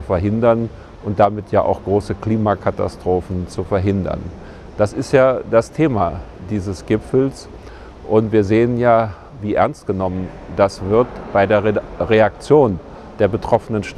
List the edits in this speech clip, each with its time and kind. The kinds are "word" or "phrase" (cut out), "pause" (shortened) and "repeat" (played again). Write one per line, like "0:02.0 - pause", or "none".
none